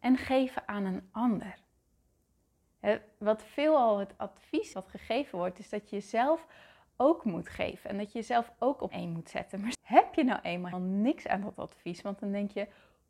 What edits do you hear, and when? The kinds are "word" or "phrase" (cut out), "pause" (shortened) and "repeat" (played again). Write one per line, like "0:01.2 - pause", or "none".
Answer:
0:04.7 - word
0:08.9 - word
0:09.7 - word
0:10.7 - word